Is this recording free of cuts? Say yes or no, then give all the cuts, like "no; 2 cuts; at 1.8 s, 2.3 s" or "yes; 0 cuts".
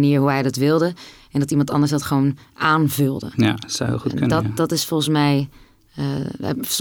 yes; 0 cuts